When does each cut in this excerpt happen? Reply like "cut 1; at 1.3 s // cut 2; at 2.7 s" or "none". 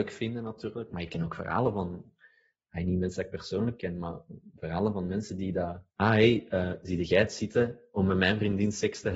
cut 1; at 5.9 s